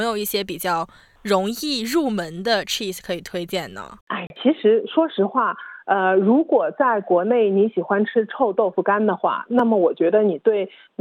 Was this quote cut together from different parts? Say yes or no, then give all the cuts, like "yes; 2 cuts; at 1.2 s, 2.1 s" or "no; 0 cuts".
yes; 1 cut; at 4.0 s